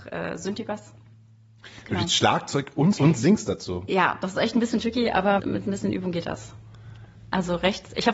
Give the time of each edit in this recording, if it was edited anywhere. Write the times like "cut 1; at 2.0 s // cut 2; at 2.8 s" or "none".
cut 1; at 3.0 s // cut 2; at 5.4 s